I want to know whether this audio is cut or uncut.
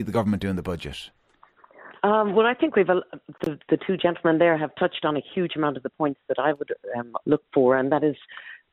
cut